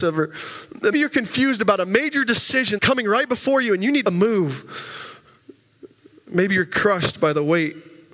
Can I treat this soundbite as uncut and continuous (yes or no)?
no